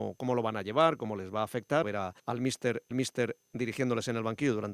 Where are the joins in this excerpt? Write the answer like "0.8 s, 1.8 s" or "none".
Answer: 1.8 s, 2.2 s, 2.9 s